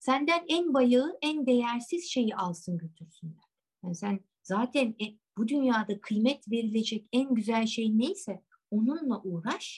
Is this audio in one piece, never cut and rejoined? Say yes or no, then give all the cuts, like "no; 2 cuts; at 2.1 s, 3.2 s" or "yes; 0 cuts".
no; 3 cuts; at 3.6 s, 4.3 s, 5.3 s